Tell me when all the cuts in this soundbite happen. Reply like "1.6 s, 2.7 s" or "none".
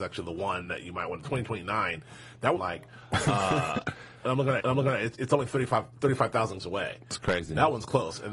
2.6 s, 4.6 s, 6.6 s